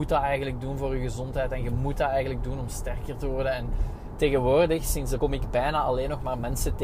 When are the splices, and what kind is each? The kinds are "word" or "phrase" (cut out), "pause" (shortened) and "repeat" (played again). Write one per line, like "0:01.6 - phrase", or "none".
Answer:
0:05.2 - word